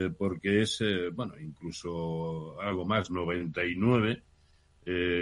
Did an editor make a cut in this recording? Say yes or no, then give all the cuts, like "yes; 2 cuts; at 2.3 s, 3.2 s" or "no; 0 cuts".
no; 0 cuts